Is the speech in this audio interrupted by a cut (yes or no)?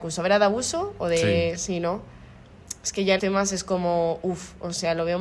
yes